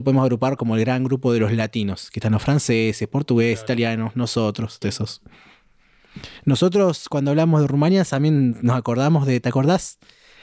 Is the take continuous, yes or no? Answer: no